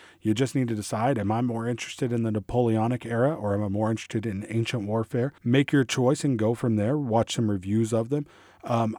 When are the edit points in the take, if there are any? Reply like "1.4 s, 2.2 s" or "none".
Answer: 5.4 s